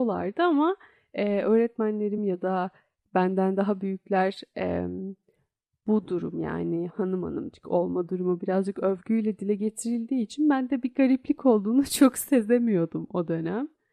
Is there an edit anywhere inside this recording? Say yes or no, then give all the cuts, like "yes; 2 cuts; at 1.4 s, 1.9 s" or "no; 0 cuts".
no; 0 cuts